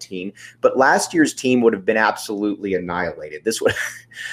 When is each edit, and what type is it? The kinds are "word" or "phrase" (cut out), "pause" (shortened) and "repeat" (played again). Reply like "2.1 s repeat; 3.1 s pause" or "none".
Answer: none